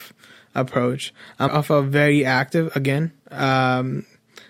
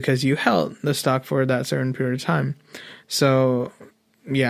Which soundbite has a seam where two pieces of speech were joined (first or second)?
first